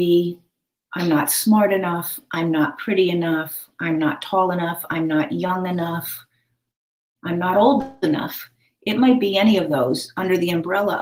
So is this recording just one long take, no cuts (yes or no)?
yes